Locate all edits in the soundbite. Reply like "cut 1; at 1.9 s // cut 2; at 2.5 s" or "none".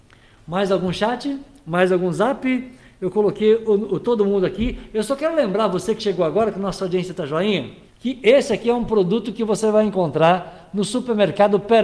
cut 1; at 7.9 s